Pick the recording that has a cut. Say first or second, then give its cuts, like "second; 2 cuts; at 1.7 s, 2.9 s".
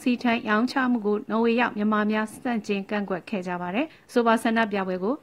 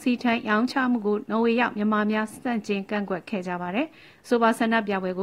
first; 1 cut; at 3.9 s